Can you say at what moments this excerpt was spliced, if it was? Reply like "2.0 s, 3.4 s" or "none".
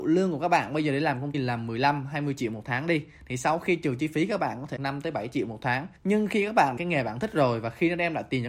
1.3 s, 4.8 s, 6.0 s, 6.8 s